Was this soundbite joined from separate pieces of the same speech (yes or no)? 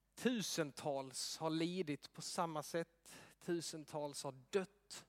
no